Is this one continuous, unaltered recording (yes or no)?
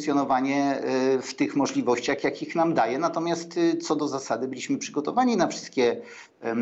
yes